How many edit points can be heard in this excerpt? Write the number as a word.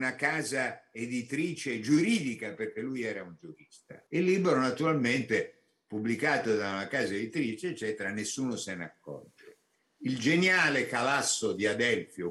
two